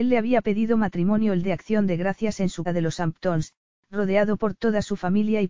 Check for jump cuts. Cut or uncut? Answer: cut